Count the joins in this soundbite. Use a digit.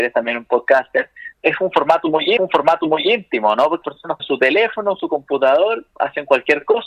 4